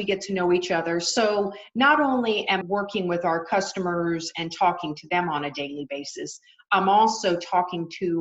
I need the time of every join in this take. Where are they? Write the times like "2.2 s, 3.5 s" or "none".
2.6 s